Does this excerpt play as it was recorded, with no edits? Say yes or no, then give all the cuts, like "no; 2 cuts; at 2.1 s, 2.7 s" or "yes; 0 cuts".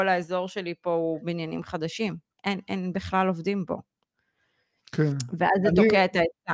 yes; 0 cuts